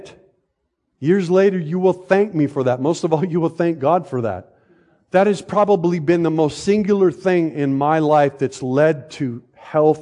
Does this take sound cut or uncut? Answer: uncut